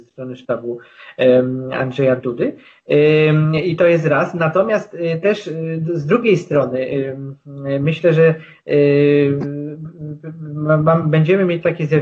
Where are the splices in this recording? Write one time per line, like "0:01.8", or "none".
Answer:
none